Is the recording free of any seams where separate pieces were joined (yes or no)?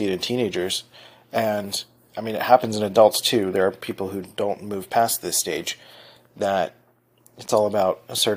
yes